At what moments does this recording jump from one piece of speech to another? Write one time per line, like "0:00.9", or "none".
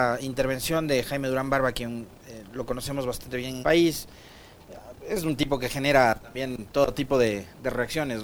0:03.6